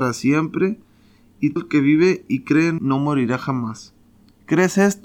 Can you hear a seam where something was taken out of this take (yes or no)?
yes